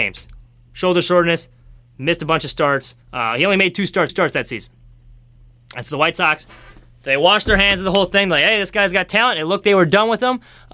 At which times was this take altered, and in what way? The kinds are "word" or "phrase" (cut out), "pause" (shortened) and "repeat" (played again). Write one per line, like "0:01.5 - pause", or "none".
0:03.0 - pause
0:04.1 - repeat
0:09.6 - word